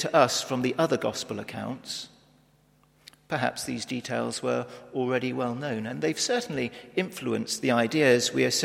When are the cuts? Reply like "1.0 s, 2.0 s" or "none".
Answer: none